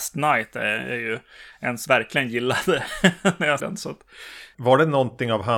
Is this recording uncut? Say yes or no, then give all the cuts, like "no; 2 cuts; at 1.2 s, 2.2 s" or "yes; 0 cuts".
no; 2 cuts; at 1.9 s, 3.6 s